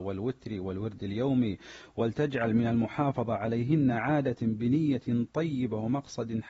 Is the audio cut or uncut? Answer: uncut